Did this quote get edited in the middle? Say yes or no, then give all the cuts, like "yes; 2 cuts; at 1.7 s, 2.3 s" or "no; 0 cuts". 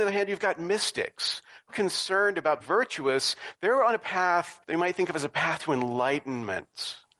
yes; 3 cuts; at 1.7 s, 2.6 s, 4.6 s